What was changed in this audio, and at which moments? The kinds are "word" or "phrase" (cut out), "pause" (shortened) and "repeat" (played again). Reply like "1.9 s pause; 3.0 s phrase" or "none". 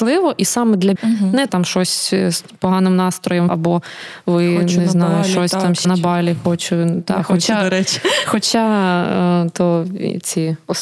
0.9 s word; 1.5 s phrase; 3.5 s word; 5.8 s word